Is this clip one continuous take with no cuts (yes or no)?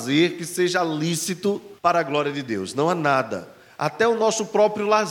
no